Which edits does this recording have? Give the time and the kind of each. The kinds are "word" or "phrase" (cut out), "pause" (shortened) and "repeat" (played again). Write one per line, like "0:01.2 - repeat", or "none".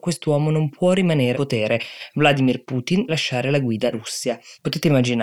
0:01.3 - word
0:03.1 - word
0:03.9 - word